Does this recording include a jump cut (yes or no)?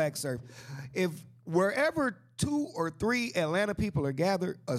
no